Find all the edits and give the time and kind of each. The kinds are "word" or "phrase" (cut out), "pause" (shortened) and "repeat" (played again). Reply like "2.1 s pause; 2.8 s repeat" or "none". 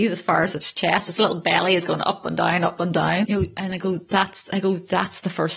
3.2 s word